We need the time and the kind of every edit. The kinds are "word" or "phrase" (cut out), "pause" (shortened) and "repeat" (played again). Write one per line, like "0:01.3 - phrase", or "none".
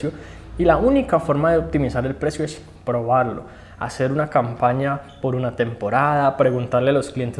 none

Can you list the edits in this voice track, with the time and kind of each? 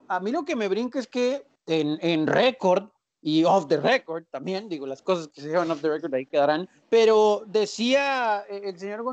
0:06.8 - pause

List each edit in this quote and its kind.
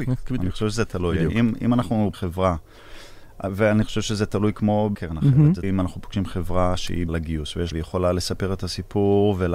0:02.1 - word
0:04.9 - word
0:05.6 - word
0:07.1 - word
0:07.7 - phrase

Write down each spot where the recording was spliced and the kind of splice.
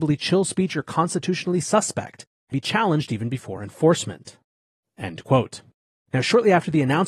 0:02.5 - word

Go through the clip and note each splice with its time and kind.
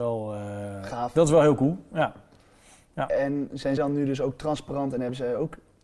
0:03.8 - word

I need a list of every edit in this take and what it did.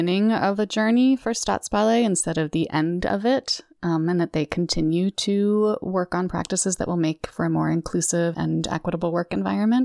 0:08.3 - word

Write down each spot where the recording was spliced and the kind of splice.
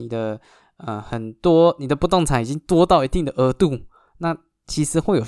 none

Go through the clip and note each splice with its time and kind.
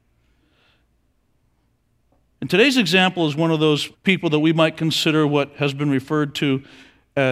0:03.9 - pause

